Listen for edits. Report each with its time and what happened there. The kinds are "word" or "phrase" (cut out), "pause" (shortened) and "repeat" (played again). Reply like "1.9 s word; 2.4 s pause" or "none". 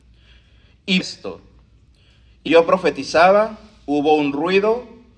1.0 s phrase; 2.5 s word